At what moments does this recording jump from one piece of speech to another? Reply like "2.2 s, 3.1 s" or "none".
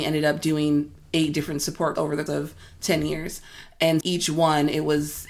2.0 s, 2.3 s, 4.0 s